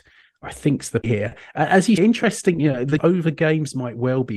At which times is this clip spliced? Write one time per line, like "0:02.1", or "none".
0:01.0
0:02.0
0:03.0